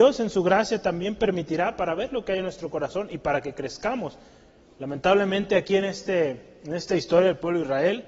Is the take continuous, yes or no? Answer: yes